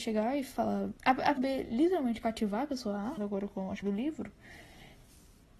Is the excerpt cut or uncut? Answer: cut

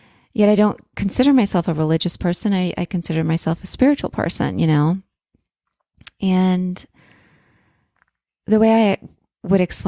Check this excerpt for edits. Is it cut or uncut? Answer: uncut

